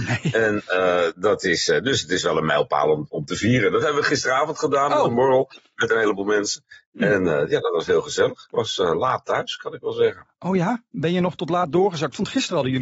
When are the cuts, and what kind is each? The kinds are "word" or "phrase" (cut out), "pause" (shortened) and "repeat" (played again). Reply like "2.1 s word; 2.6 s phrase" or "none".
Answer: none